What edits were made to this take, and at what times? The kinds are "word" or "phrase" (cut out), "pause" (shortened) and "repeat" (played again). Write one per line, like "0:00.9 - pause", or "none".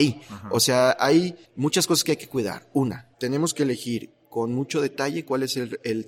0:01.4 - pause
0:03.1 - pause